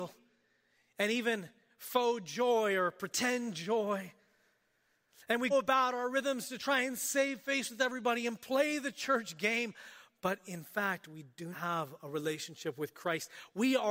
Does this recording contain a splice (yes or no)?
yes